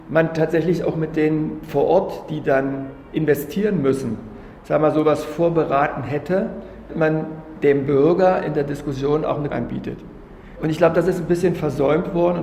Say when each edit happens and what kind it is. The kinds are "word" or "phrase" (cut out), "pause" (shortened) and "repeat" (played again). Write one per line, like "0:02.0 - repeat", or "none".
0:06.9 - word
0:09.5 - phrase